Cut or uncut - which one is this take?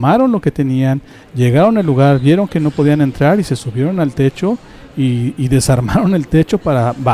uncut